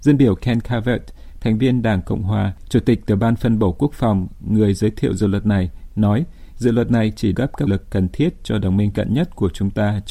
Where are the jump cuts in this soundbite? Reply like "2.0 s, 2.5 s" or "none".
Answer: 7.3 s, 7.7 s, 8.9 s